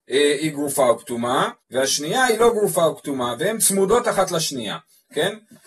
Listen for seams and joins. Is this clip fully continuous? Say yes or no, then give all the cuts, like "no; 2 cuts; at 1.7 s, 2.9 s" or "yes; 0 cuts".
no; 1 cut; at 1.6 s